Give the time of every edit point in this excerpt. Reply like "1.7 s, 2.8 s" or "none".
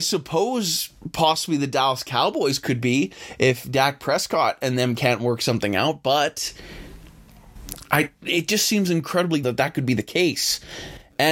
9.4 s